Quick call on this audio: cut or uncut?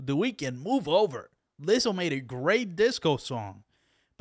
uncut